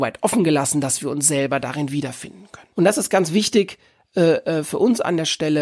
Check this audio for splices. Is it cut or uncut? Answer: cut